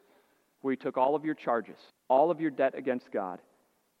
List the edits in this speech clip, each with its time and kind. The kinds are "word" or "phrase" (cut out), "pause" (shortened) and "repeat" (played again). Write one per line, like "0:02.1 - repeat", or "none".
0:01.9 - pause